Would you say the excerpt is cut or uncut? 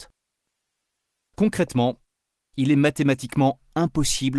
uncut